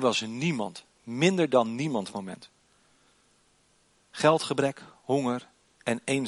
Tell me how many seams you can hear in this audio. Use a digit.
2